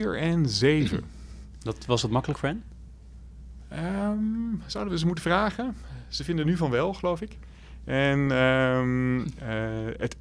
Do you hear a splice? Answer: no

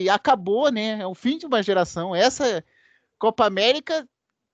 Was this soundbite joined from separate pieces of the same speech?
no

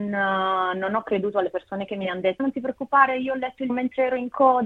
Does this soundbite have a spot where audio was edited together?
yes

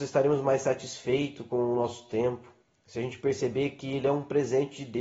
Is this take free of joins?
no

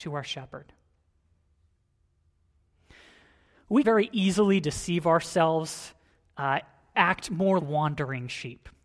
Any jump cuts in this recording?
yes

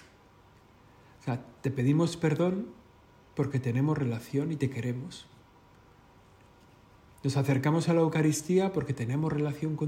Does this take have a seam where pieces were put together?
no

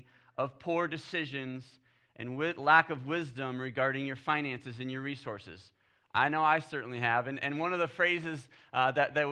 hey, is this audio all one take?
yes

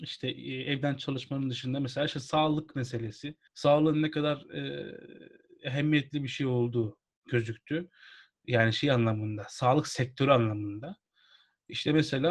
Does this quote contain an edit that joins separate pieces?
yes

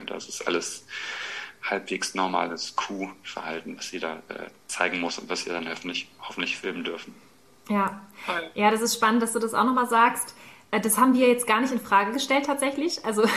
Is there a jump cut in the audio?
no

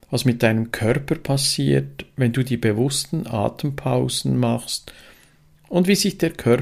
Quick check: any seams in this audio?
no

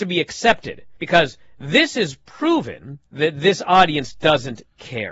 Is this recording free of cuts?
no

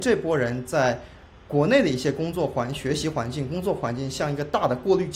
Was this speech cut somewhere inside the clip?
no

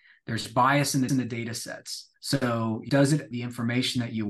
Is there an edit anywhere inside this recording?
yes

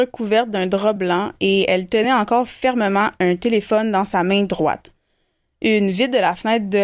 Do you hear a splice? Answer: no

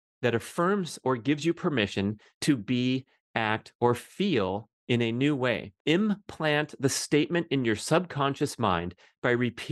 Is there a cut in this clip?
yes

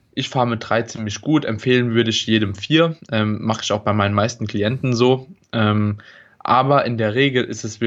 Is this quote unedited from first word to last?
yes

